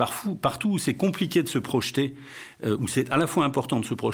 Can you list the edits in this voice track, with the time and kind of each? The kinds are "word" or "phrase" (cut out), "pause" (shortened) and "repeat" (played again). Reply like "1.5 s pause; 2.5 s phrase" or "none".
none